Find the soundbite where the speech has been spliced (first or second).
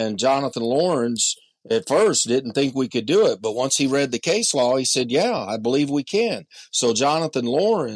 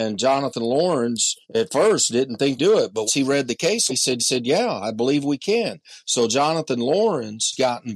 second